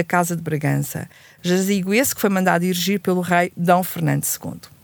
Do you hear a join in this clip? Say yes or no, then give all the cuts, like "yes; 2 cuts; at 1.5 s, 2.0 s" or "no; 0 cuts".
no; 0 cuts